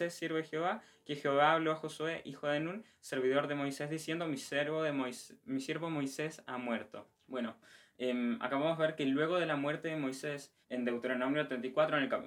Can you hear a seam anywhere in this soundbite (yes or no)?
yes